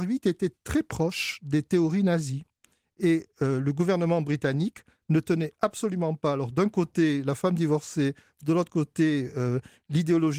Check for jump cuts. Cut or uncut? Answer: uncut